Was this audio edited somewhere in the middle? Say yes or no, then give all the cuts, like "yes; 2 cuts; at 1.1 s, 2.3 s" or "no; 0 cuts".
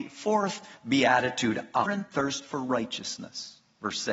yes; 1 cut; at 1.9 s